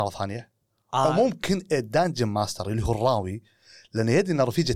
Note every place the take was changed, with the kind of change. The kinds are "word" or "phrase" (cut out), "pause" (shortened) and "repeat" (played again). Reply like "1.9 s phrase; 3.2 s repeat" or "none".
none